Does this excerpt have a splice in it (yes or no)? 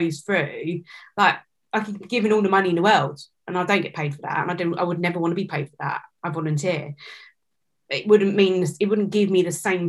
no